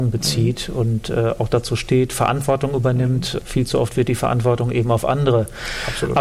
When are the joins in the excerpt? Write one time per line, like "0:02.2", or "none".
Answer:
none